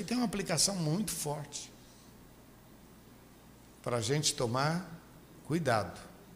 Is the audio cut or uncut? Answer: uncut